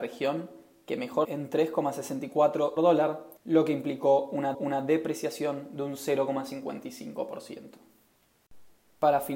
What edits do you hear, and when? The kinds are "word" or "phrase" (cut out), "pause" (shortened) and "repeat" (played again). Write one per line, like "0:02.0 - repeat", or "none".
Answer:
0:01.2 - phrase
0:02.8 - phrase
0:03.4 - pause
0:04.5 - repeat